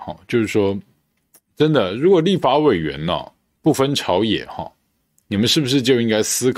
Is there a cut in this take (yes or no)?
no